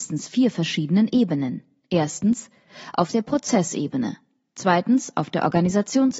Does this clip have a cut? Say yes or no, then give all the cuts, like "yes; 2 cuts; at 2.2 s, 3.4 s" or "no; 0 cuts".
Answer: no; 0 cuts